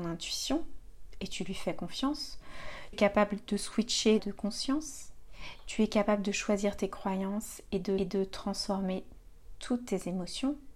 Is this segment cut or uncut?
cut